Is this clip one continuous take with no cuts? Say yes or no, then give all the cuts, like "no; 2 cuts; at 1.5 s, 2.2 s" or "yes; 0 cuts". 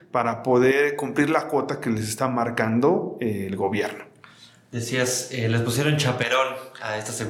yes; 0 cuts